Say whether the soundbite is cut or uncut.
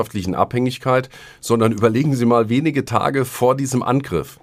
uncut